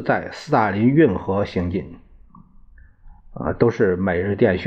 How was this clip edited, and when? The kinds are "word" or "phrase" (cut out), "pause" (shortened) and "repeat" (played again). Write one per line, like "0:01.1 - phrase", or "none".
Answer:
0:03.2 - pause